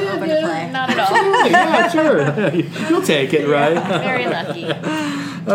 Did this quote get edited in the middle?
no; 0 cuts

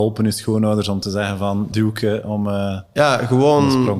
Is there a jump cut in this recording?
yes; 1 cut; at 1.7 s

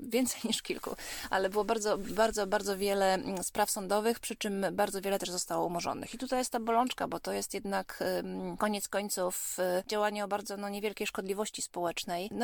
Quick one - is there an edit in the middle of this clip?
no; 0 cuts

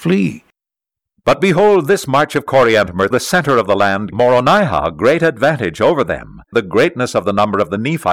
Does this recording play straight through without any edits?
no; 3 cuts; at 3.1 s, 4.1 s, 6.5 s

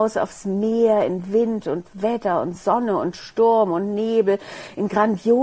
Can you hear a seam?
no; 0 cuts

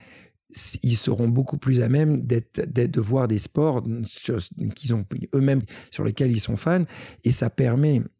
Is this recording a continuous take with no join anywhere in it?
no; 1 cut; at 5.6 s

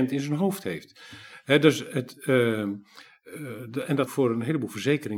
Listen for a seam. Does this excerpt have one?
yes; 1 cut; at 4.1 s

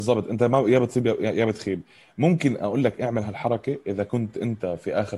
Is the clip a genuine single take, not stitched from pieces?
yes; 0 cuts

